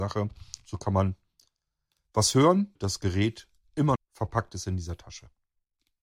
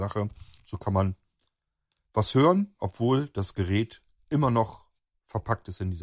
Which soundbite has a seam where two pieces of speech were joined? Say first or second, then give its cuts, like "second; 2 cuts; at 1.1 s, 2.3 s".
first; 2 cuts; at 2.8 s, 3.9 s